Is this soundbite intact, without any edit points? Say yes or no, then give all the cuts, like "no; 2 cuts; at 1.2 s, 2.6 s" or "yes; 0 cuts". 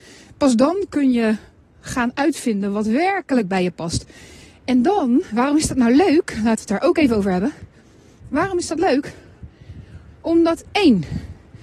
yes; 0 cuts